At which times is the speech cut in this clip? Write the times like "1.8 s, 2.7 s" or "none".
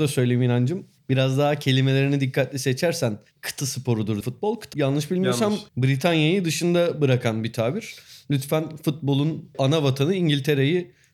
3.6 s, 4.2 s, 4.7 s, 5.7 s